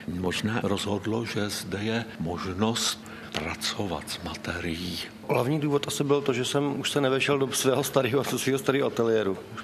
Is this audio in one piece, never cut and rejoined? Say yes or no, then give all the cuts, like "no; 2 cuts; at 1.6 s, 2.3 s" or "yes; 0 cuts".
yes; 0 cuts